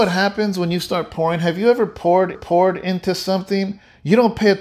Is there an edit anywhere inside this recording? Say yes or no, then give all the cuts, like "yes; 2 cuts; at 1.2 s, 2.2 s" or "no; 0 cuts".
yes; 1 cut; at 2.3 s